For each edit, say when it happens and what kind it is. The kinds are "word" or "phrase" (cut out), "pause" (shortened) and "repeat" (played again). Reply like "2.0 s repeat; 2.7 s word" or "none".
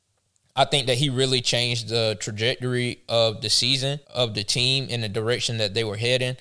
4.0 s pause